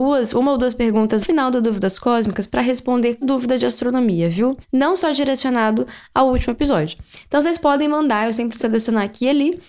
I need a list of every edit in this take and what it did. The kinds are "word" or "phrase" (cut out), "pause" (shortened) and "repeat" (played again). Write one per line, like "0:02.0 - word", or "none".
0:01.2 - word
0:03.2 - word
0:08.6 - word